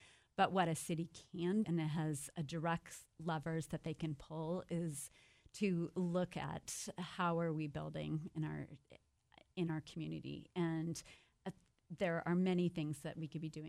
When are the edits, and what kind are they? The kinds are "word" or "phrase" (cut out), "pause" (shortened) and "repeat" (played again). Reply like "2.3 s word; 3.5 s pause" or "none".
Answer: 1.6 s word